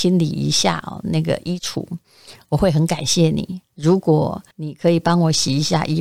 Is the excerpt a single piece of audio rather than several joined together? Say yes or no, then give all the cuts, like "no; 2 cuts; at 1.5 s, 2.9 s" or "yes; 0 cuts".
no; 2 cuts; at 3.7 s, 4.5 s